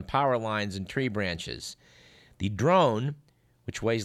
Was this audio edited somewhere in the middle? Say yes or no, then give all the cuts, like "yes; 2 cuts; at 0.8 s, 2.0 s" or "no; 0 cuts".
no; 0 cuts